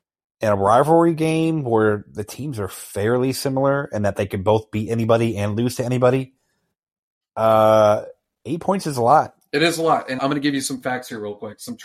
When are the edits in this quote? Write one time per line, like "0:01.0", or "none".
0:10.2